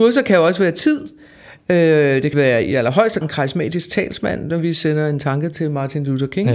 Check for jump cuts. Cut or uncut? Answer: cut